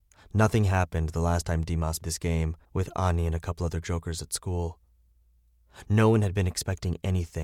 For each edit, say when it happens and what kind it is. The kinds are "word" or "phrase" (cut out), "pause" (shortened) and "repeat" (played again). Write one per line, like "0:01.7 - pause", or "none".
0:02.0 - word
0:02.6 - pause